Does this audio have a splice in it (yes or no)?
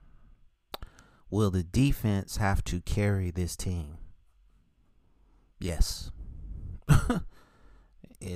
no